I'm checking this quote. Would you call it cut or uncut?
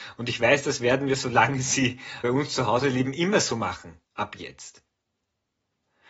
cut